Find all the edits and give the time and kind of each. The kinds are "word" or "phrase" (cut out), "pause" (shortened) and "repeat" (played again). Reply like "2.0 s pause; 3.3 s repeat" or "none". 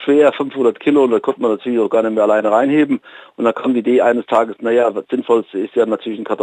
none

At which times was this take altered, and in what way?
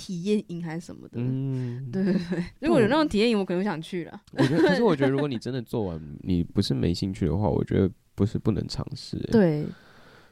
2.6 s pause; 4.3 s pause

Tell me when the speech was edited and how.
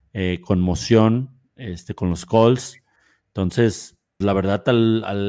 4.2 s word

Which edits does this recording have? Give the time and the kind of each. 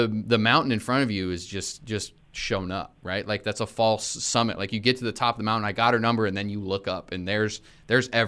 none

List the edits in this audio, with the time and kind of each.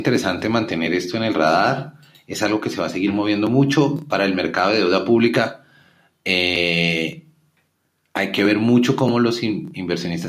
none

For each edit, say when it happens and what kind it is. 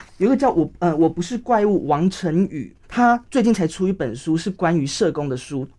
2.8 s pause

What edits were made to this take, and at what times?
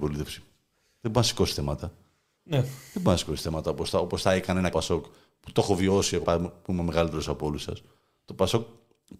4.7 s word; 6.2 s word

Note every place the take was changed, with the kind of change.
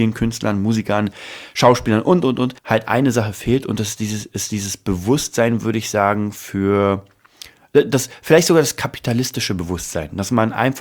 2.6 s pause

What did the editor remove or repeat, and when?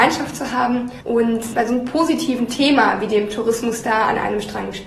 none

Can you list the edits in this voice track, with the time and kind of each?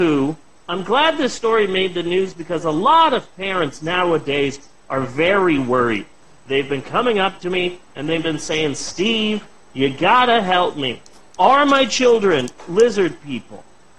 none

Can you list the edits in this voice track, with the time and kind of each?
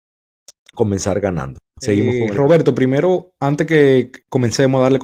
none

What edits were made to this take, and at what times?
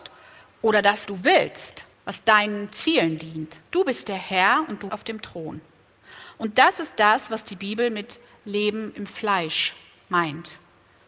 1.1 s word; 1.9 s pause; 3.7 s pause; 4.9 s word

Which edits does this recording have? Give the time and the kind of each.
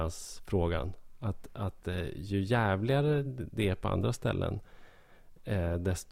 none

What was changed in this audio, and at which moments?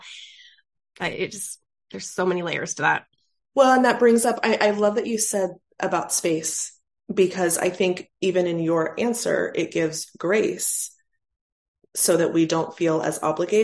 none

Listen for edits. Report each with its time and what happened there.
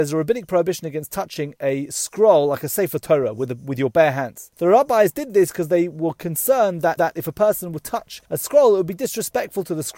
4.5 s pause; 7.0 s repeat; 8.3 s pause

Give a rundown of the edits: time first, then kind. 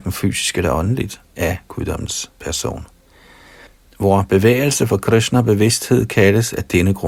3.7 s pause

